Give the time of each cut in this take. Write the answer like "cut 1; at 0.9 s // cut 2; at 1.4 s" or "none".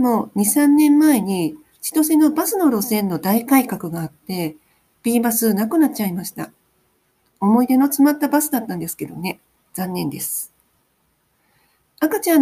none

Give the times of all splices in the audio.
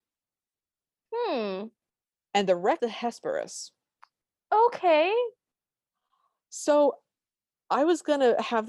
cut 1; at 2.8 s

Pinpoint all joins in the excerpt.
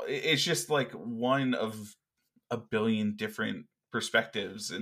none

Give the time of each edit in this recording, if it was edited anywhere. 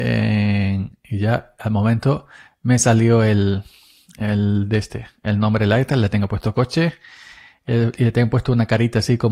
none

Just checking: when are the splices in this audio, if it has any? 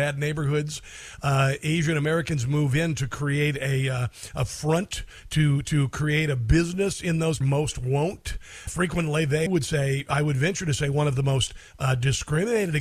cut 1; at 7.4 s // cut 2; at 8.7 s // cut 3; at 9.5 s

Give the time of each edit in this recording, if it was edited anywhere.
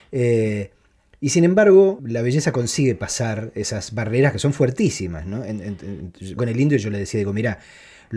cut 1; at 2.0 s // cut 2; at 6.4 s

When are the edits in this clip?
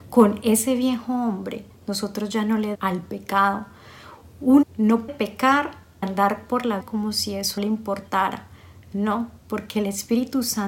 cut 1; at 1.7 s // cut 2; at 2.7 s // cut 3; at 4.6 s // cut 4; at 5.1 s // cut 5; at 6.0 s // cut 6; at 6.8 s // cut 7; at 7.6 s

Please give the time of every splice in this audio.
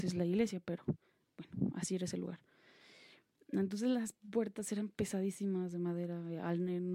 none

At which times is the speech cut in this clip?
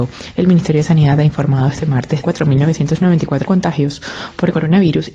cut 1; at 2.2 s // cut 2; at 3.4 s

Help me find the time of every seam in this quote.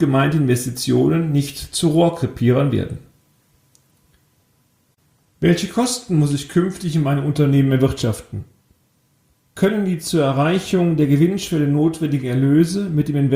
none

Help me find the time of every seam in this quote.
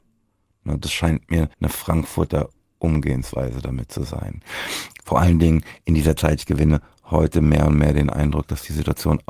cut 1; at 1.5 s

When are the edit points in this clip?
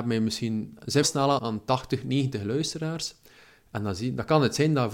cut 1; at 1.0 s // cut 2; at 1.4 s

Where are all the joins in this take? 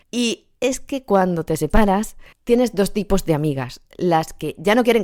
cut 1; at 2.3 s

